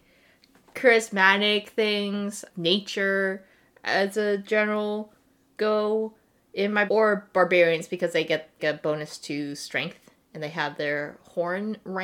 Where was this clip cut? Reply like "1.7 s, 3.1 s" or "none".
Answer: 2.5 s, 6.9 s, 8.6 s